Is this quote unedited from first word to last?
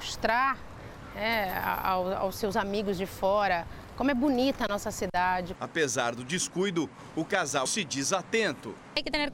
no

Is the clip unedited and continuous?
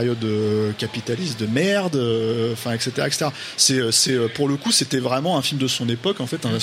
yes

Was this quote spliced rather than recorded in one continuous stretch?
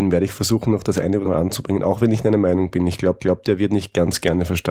yes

